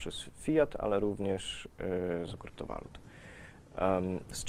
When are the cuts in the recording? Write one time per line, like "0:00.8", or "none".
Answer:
0:02.4